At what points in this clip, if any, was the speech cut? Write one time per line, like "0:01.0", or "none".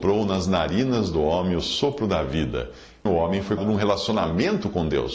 0:03.1
0:03.6